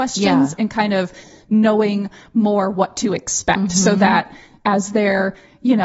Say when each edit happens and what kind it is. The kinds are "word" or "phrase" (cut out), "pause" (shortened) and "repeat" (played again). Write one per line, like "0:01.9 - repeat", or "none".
none